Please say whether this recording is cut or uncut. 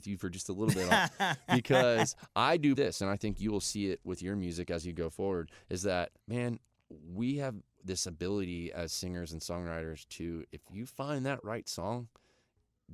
cut